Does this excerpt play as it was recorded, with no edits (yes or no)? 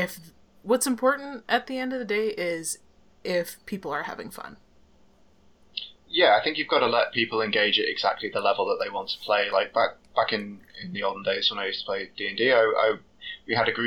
yes